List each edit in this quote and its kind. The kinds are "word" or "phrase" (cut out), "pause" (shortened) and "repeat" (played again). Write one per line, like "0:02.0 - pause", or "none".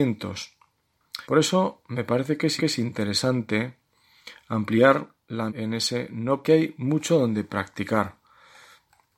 0:01.2 - pause
0:02.6 - repeat
0:05.5 - word
0:06.4 - phrase